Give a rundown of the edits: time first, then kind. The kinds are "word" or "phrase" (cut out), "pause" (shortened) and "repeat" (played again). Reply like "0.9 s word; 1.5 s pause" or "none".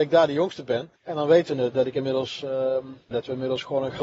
1.0 s pause; 3.1 s word